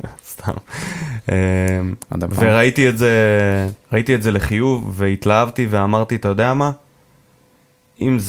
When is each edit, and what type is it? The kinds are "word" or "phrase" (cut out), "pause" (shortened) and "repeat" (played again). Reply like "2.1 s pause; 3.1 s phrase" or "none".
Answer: 3.8 s pause